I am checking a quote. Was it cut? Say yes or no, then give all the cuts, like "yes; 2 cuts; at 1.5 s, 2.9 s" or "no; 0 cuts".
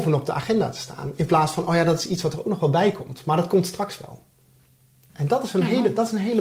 no; 0 cuts